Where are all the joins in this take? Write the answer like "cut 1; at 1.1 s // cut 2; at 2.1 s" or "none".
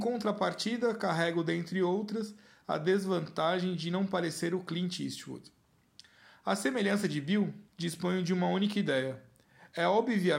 cut 1; at 7.7 s